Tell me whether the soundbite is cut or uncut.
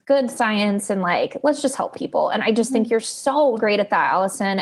cut